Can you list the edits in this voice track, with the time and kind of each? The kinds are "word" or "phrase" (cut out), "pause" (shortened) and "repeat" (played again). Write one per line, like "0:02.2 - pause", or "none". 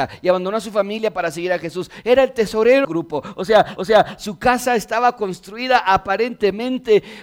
0:02.8 - word
0:03.8 - repeat